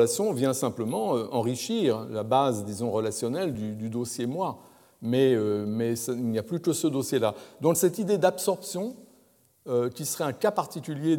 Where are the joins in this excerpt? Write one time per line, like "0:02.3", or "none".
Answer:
none

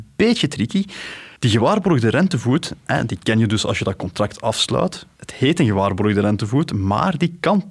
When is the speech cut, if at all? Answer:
0:01.4
0:05.1

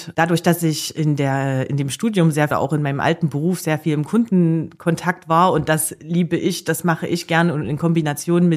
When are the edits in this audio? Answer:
0:02.5

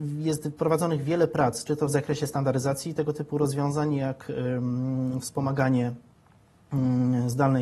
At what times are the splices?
none

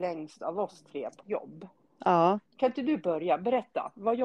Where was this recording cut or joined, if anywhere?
0:01.2
0:02.5

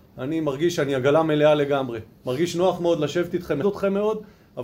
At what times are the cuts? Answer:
0:03.6

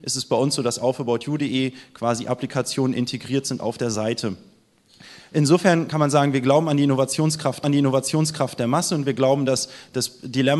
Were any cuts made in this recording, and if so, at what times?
0:07.6

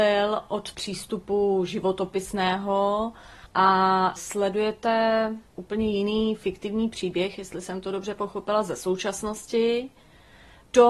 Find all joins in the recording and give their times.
0:05.5

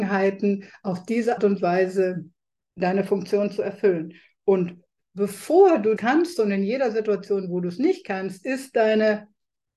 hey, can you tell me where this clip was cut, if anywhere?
0:01.4
0:02.6
0:06.0

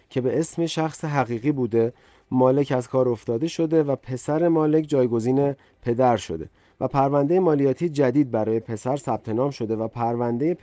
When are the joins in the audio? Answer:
none

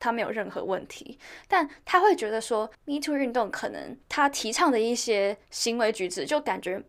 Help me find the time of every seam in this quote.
0:02.7
0:04.0

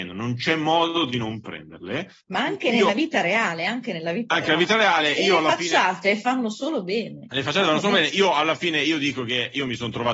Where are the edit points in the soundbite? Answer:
0:02.2

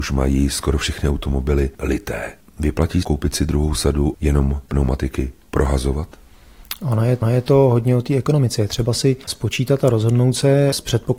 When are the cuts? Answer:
0:01.8
0:03.0
0:04.1
0:04.7
0:07.2

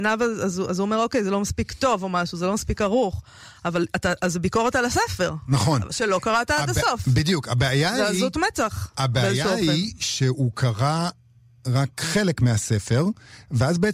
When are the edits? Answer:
0:11.9

